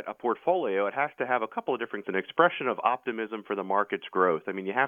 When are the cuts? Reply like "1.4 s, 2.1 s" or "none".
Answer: 2.0 s